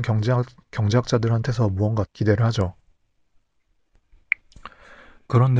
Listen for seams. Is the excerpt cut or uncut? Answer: cut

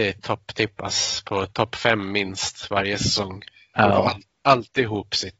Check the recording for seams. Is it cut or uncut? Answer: uncut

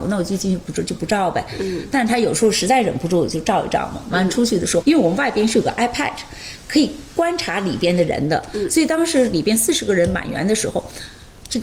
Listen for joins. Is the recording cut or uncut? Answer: cut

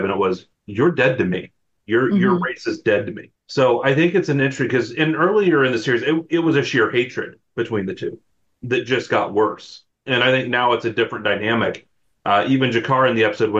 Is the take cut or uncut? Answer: uncut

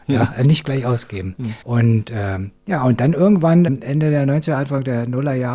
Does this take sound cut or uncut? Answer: cut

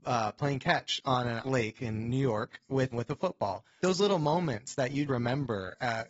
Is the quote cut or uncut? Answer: cut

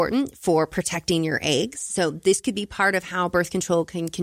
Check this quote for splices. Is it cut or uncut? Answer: uncut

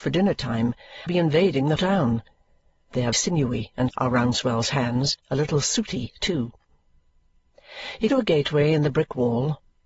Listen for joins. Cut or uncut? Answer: cut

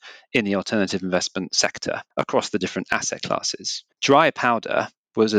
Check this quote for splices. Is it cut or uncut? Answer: cut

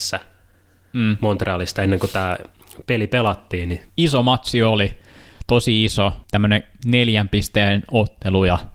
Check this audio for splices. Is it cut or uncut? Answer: cut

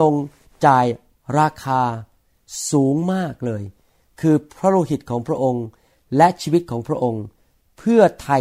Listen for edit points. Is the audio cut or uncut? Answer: uncut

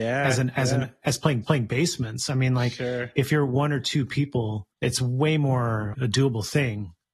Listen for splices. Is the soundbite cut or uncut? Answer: cut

